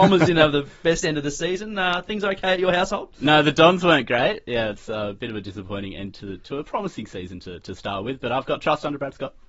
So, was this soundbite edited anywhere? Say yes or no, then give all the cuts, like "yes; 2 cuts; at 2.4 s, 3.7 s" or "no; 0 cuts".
no; 0 cuts